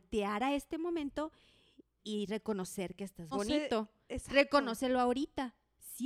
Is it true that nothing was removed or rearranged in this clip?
no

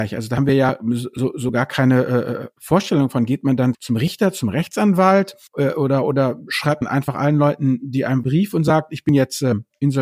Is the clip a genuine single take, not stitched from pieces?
no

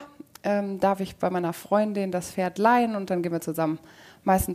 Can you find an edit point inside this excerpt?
no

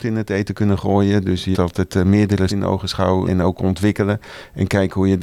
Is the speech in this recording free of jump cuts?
no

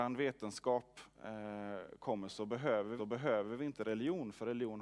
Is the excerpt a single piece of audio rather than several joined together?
no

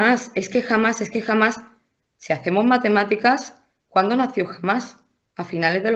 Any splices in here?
no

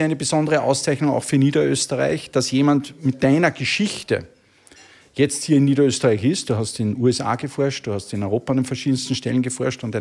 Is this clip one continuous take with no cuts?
yes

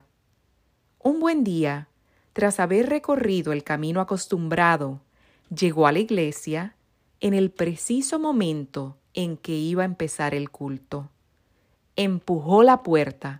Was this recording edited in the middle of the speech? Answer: no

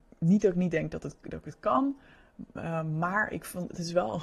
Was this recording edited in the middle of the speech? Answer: no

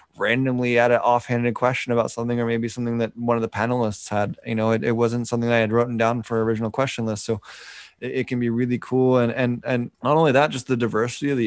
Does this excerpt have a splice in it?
yes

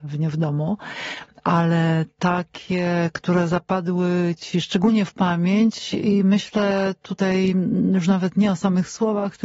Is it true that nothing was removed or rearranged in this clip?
yes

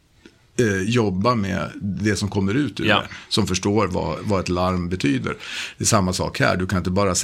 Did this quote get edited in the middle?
no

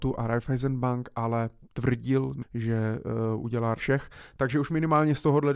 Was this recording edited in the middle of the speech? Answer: yes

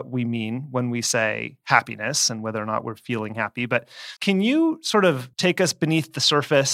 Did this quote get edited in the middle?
yes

